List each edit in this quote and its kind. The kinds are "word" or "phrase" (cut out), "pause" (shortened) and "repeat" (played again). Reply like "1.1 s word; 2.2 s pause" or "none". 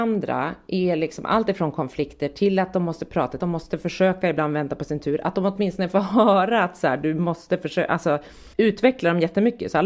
3.4 s phrase; 8.5 s pause